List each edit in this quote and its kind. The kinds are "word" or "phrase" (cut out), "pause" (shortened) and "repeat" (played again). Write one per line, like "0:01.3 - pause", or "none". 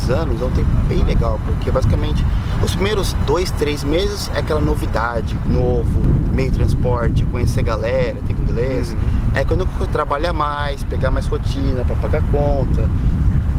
0:05.5 - word
0:08.4 - phrase
0:09.9 - word

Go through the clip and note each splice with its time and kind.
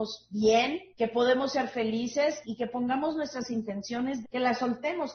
0:00.9 - pause
0:02.4 - word
0:04.2 - phrase

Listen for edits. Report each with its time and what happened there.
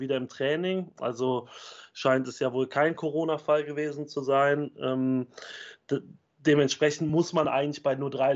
none

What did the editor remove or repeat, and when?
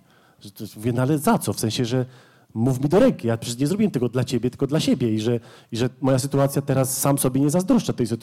none

